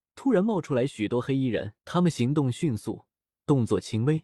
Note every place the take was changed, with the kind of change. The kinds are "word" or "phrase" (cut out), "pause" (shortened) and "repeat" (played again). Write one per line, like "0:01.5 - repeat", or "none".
0:01.8 - pause